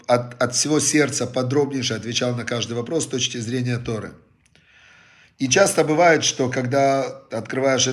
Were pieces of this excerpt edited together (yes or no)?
no